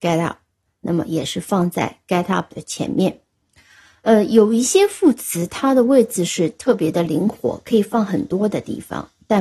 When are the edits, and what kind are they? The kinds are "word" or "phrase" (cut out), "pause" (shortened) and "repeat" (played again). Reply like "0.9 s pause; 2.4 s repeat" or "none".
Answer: none